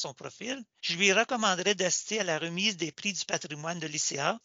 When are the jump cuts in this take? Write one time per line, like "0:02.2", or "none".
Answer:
none